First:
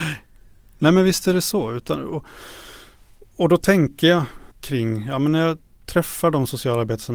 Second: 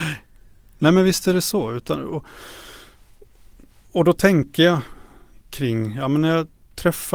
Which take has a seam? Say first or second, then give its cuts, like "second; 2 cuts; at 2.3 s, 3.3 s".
first; 2 cuts; at 3.3 s, 4.5 s